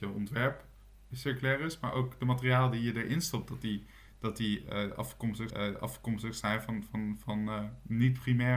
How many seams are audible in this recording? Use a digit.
1